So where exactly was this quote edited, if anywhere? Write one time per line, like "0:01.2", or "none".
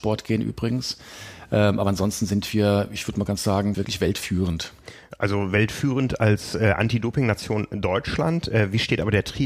0:03.7

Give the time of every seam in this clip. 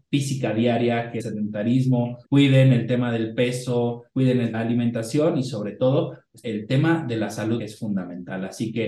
0:01.2
0:02.2
0:04.1
0:04.5
0:06.4
0:07.6

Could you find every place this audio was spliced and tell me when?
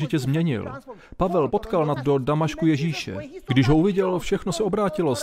0:01.5
0:02.0

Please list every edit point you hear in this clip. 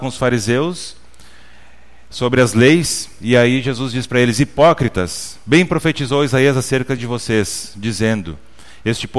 none

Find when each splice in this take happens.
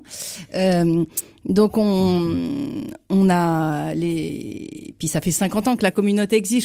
none

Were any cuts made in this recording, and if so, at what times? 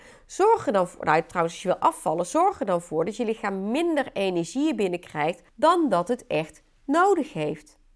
0:05.5

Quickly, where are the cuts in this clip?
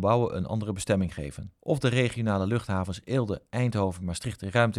0:01.6

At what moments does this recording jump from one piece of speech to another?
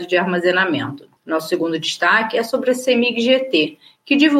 0:01.2

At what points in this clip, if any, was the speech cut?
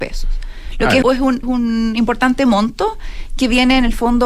0:01.0
0:01.4

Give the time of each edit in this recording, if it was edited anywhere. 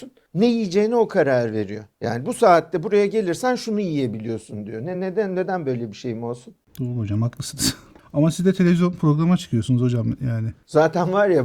none

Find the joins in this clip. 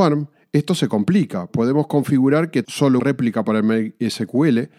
0:01.5
0:02.6
0:03.0

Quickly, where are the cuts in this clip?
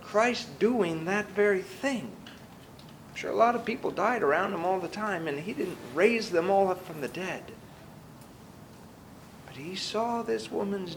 none

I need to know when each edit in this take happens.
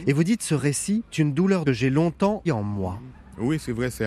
0:01.1
0:01.7
0:02.5

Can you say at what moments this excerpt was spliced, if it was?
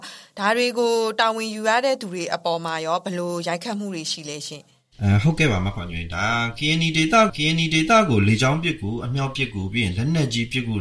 0:07.3

